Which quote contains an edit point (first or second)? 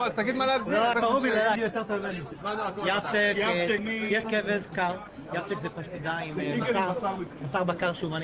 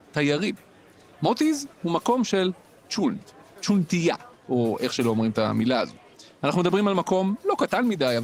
first